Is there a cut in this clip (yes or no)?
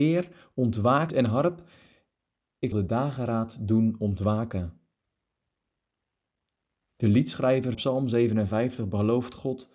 yes